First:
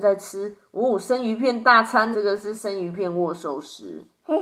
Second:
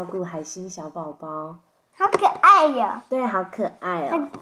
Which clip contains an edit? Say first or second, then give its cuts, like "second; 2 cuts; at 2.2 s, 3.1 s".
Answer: first; 1 cut; at 2.1 s